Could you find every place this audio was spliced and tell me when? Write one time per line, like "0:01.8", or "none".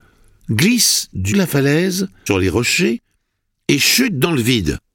0:01.3
0:02.3